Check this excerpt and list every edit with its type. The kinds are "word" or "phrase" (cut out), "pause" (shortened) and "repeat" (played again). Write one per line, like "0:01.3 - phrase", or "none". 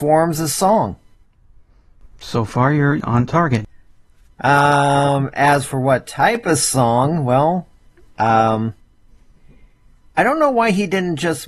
none